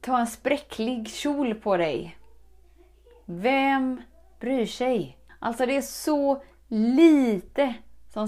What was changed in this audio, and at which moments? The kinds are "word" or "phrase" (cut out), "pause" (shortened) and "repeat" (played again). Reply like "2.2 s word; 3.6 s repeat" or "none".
5.3 s pause

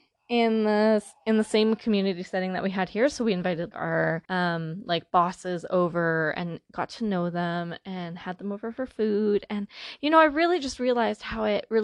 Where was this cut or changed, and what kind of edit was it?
3.7 s word; 4.2 s pause

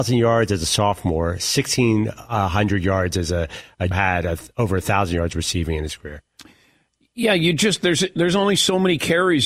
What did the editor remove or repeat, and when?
3.9 s phrase

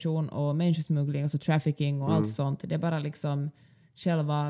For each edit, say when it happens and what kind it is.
none

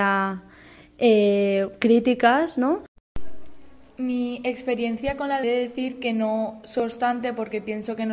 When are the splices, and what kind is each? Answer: 3.9 s pause; 5.4 s phrase

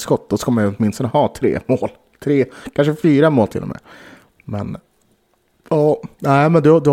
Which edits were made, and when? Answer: none

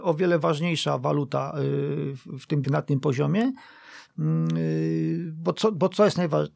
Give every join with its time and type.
2.6 s word

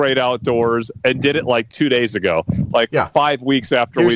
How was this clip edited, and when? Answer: none

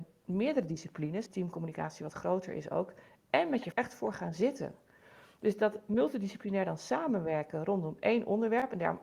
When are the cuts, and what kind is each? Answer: 1.3 s phrase; 3.7 s word

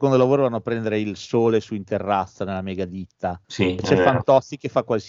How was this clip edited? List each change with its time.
3.4 s pause

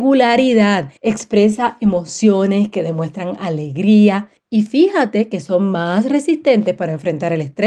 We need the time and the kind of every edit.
1.0 s pause

